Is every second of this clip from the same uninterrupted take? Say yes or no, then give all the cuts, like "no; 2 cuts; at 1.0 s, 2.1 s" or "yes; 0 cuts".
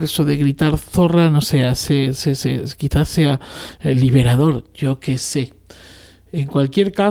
yes; 0 cuts